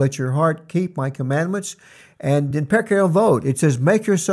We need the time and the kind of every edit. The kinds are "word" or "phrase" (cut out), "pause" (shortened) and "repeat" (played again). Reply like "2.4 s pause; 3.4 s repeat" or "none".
none